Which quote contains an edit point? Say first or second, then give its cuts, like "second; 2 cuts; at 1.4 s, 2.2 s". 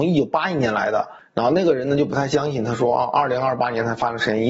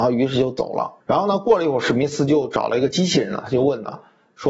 second; 1 cut; at 1.0 s